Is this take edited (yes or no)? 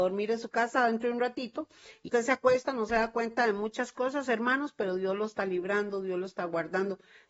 yes